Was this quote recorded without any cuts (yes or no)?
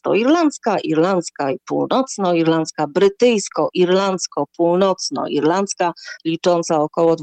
yes